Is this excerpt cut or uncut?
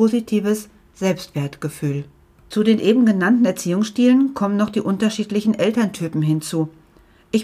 uncut